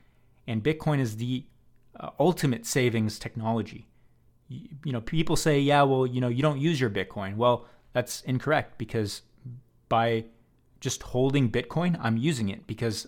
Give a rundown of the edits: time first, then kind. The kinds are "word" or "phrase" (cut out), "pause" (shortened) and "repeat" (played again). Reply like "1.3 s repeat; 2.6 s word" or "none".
none